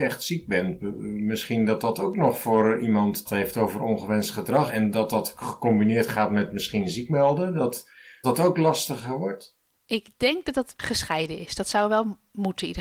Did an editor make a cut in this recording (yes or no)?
yes